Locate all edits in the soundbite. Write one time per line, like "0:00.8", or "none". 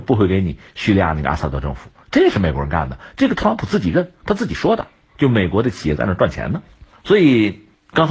none